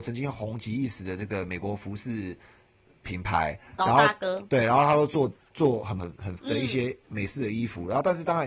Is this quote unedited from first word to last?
no; 2 cuts; at 6.0 s, 6.4 s

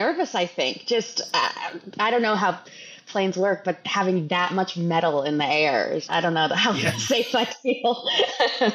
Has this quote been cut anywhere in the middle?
yes; 1 cut; at 6.1 s

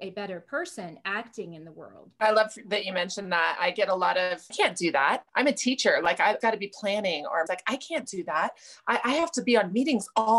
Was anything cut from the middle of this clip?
yes; 4 cuts; at 4.5 s, 5.3 s, 6.4 s, 7.5 s

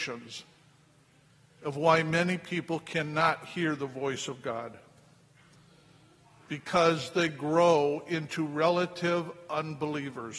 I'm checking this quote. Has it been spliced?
no; 0 cuts

